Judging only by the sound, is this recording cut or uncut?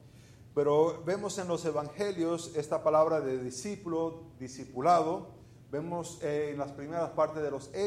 uncut